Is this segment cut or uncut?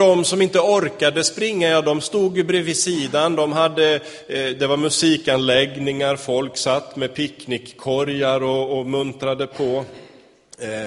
uncut